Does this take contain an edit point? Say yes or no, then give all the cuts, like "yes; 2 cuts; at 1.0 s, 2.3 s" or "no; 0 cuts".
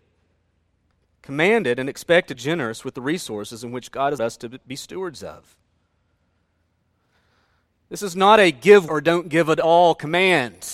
yes; 3 cuts; at 2.3 s, 4.2 s, 8.9 s